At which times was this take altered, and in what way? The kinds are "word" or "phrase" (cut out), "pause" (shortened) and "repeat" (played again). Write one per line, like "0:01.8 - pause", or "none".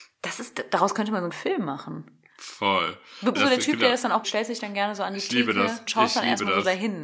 0:01.3 - word
0:03.3 - word
0:04.2 - word
0:05.9 - word

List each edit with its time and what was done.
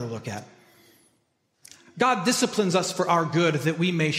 none

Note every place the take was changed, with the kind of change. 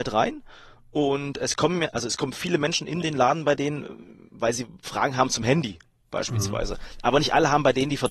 none

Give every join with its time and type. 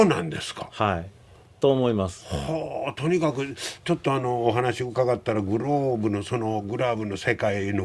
none

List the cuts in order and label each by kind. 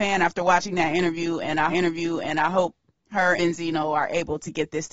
0:01.7 - repeat
0:03.4 - word

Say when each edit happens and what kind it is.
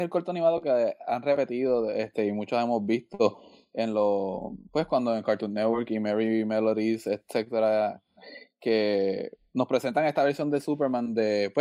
none

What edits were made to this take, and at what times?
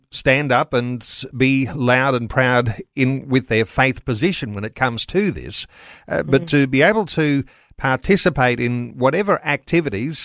none

